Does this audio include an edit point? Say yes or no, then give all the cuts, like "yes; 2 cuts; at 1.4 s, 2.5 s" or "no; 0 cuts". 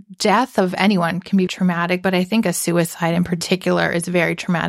yes; 1 cut; at 1.5 s